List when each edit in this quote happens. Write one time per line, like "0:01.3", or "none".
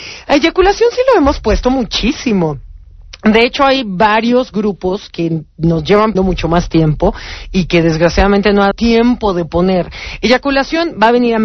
0:06.2
0:08.7